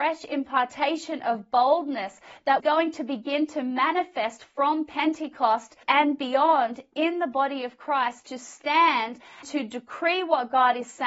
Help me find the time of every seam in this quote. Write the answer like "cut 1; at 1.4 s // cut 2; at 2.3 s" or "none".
cut 1; at 2.6 s // cut 2; at 5.8 s // cut 3; at 9.4 s